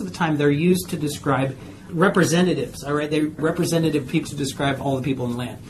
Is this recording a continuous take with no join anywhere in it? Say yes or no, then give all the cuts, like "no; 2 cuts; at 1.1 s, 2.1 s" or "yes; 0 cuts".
no; 2 cuts; at 3.4 s, 4.2 s